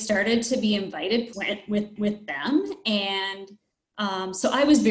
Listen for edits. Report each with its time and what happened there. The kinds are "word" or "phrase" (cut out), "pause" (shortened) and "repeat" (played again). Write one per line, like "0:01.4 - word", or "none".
0:01.3 - phrase
0:02.0 - repeat

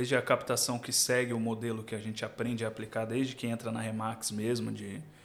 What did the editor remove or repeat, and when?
none

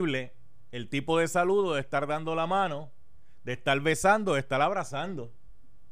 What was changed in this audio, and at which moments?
none

